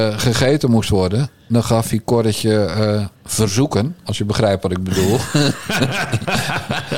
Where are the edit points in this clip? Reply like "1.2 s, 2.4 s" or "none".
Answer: 3.2 s